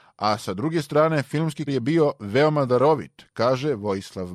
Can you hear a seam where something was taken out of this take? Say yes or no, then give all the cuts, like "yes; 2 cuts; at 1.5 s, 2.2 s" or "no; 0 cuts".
yes; 1 cut; at 1.7 s